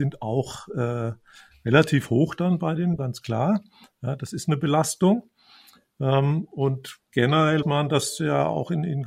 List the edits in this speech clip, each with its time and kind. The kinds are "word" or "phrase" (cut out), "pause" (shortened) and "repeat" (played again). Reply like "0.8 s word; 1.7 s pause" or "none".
3.0 s word; 7.6 s word